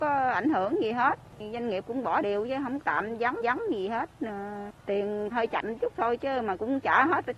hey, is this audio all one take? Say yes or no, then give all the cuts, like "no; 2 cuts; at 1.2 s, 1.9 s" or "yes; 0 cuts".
no; 4 cuts; at 2.2 s, 2.8 s, 3.4 s, 5.3 s